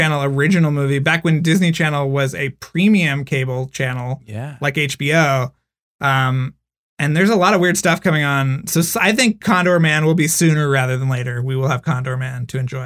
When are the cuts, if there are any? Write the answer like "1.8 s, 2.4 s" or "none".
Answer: none